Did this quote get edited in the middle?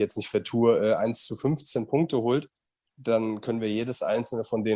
no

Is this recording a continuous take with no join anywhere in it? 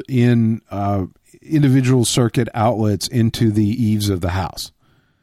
yes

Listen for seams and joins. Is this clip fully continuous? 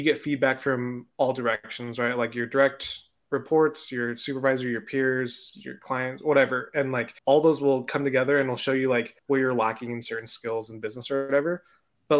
no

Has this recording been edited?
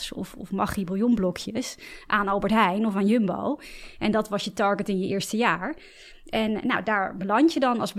no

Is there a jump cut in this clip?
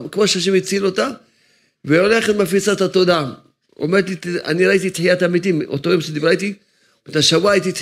no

